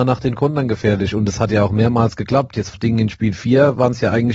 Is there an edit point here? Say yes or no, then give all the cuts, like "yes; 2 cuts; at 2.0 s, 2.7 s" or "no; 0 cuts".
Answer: yes; 1 cut; at 2.7 s